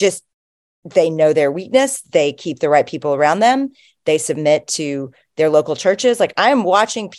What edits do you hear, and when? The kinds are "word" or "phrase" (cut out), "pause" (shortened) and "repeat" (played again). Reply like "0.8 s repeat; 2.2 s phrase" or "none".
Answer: none